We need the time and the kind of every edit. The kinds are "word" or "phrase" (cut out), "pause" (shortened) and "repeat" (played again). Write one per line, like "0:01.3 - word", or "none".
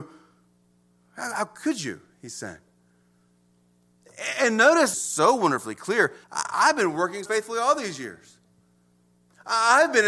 0:04.9 - phrase
0:06.2 - pause
0:07.3 - word